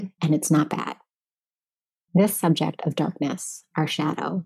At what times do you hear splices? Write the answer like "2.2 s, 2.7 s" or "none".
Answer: none

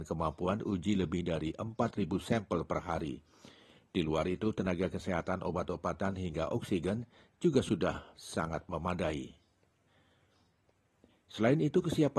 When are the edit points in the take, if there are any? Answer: none

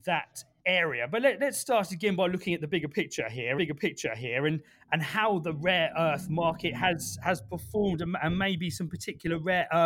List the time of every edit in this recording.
3.6 s

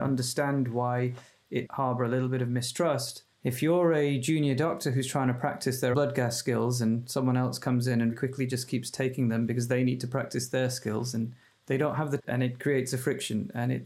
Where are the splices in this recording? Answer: 1.7 s, 3.3 s, 5.9 s, 8.1 s, 12.2 s

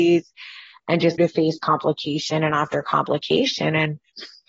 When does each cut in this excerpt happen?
1.2 s

